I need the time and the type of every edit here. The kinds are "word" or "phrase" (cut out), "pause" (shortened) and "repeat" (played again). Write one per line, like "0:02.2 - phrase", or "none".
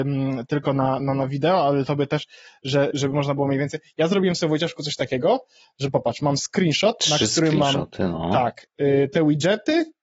0:01.0 - word
0:02.9 - word